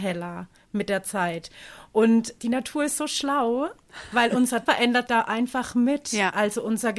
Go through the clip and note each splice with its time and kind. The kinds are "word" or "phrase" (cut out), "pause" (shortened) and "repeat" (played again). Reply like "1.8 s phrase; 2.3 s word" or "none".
2.4 s word; 4.7 s word; 5.1 s word